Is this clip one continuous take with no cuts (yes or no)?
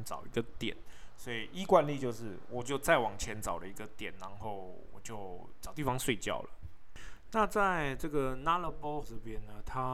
no